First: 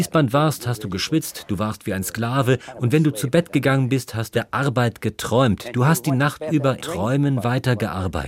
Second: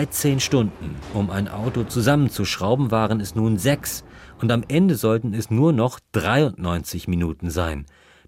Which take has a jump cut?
first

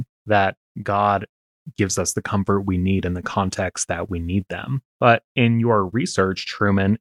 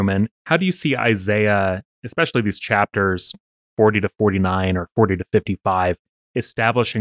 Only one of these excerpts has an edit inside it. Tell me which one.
first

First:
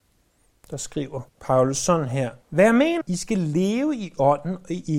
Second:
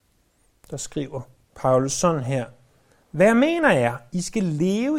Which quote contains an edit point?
first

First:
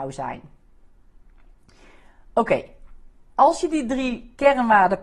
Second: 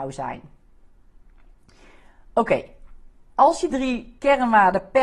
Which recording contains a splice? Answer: second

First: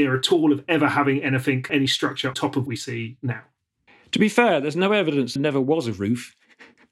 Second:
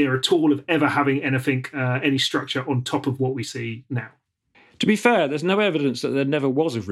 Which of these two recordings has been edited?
first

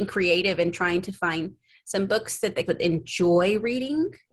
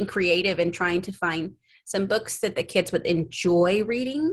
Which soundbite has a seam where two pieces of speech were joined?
first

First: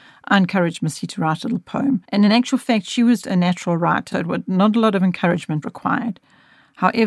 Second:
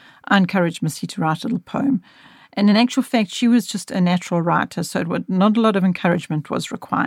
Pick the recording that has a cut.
first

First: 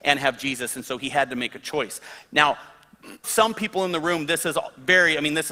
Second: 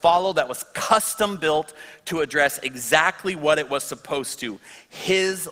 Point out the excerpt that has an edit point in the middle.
first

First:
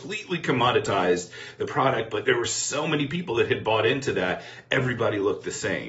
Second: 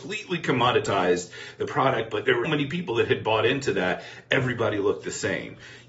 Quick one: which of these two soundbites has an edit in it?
second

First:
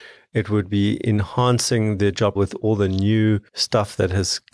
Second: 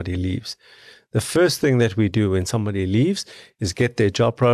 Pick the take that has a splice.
first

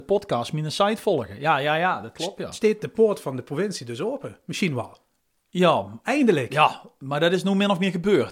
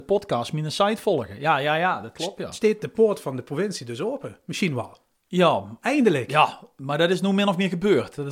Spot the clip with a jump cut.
second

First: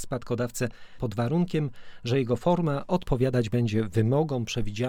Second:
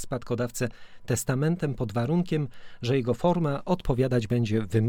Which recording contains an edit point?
first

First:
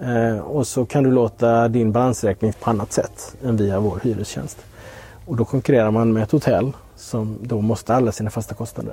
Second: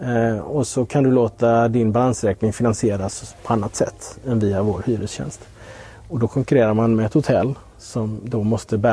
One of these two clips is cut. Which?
first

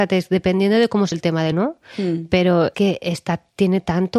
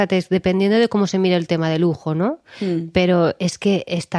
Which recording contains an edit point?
first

